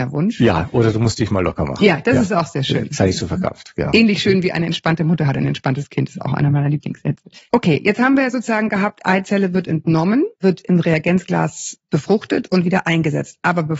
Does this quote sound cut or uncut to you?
cut